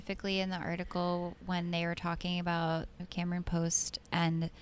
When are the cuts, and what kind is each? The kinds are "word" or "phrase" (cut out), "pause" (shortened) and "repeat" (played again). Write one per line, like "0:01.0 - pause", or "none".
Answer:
0:03.0 - word